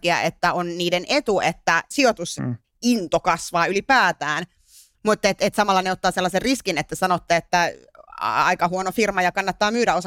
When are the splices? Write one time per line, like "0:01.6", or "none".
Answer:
none